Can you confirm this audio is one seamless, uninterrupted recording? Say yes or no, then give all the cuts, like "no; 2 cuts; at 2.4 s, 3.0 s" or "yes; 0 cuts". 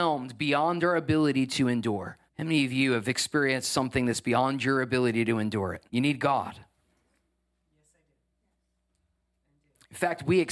no; 2 cuts; at 2.3 s, 5.9 s